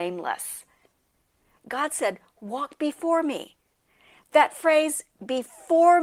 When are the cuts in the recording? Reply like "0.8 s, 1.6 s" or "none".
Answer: none